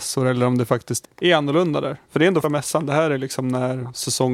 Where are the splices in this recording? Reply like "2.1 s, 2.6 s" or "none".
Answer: 1.0 s, 2.4 s